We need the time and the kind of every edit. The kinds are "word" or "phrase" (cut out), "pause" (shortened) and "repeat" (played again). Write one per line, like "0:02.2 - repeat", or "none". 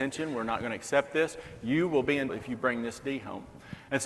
0:02.3 - word